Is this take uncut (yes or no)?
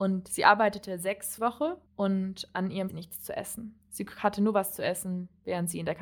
no